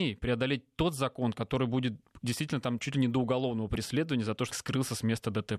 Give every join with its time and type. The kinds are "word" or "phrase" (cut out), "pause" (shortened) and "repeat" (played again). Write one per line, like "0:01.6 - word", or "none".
0:04.5 - word